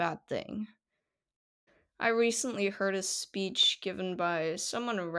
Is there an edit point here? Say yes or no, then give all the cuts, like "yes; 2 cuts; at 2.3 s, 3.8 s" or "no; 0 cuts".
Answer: no; 0 cuts